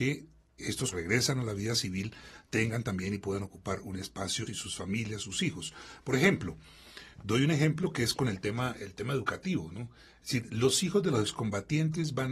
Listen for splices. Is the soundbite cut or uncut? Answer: cut